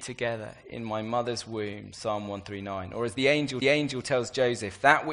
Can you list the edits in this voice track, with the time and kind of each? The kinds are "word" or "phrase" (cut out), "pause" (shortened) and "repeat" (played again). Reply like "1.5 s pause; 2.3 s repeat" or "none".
3.6 s repeat

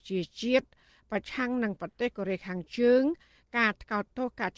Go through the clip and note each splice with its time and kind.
none

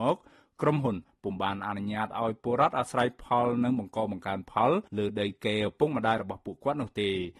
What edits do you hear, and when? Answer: 4.9 s pause

